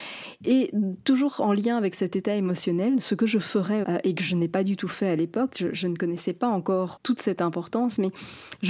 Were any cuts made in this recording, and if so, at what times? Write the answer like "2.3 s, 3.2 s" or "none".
3.8 s, 7.0 s